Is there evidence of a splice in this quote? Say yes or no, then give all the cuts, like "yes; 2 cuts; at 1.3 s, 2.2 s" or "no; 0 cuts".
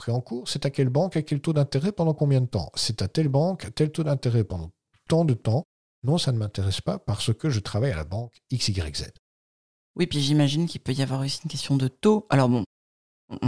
no; 0 cuts